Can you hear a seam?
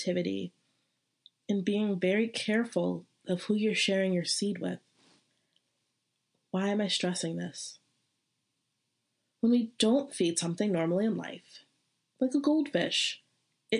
no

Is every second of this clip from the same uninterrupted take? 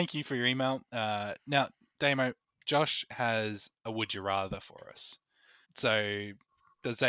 no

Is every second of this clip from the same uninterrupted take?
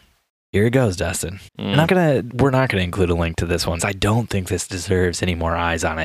no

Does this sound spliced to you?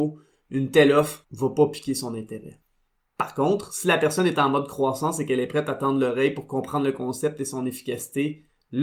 no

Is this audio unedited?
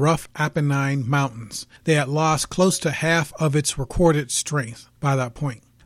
no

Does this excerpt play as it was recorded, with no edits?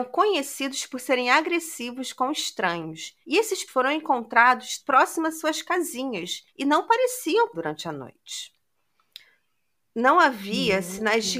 no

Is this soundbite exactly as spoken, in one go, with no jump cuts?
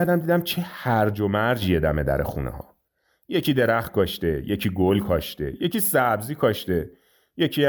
yes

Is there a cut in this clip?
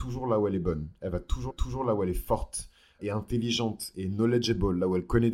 yes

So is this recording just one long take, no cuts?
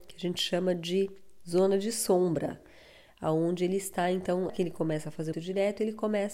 no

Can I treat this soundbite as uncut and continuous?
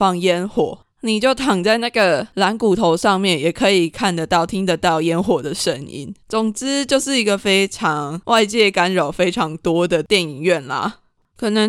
no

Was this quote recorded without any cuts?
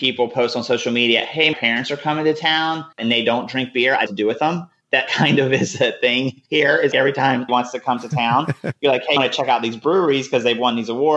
no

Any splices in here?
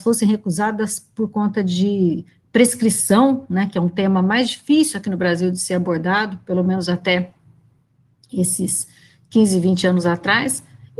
no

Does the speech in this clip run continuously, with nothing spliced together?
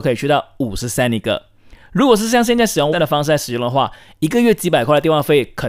no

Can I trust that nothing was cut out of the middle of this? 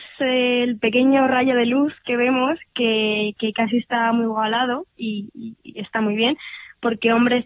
yes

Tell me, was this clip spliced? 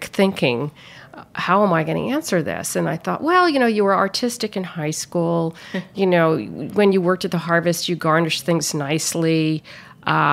no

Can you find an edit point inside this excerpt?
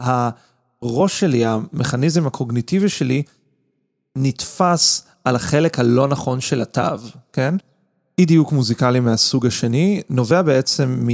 no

